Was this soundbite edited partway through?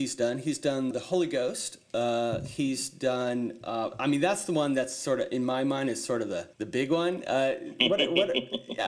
yes; 2 cuts; at 0.9 s, 6.5 s

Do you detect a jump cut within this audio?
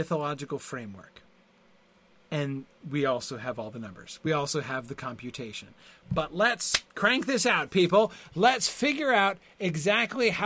no; 0 cuts

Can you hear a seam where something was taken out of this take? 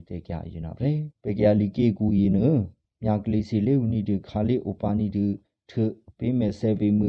yes; 1 cut; at 1.1 s

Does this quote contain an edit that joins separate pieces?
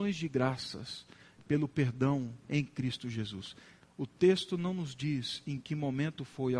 yes; 1 cut; at 2.4 s

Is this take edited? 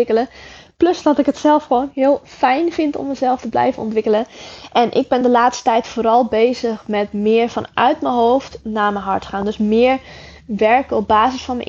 no; 0 cuts

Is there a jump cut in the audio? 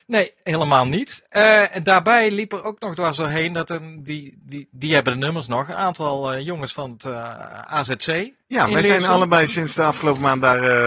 no; 0 cuts

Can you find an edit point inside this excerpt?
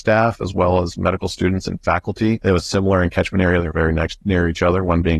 no; 0 cuts

